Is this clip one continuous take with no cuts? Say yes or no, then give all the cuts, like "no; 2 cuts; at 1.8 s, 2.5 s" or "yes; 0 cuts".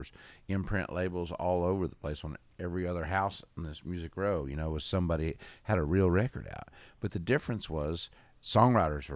yes; 0 cuts